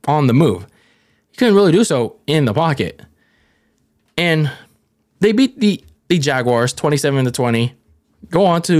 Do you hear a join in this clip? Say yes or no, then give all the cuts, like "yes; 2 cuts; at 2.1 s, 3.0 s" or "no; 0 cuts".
no; 0 cuts